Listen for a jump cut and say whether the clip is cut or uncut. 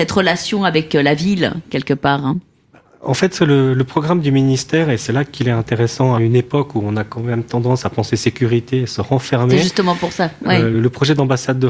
cut